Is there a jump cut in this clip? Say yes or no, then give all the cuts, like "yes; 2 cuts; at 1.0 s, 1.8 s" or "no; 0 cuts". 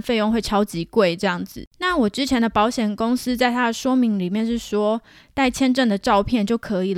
yes; 1 cut; at 1.7 s